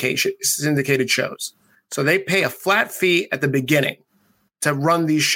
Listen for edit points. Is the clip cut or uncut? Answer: uncut